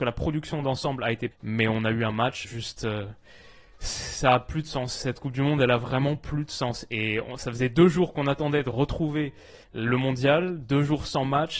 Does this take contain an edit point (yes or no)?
yes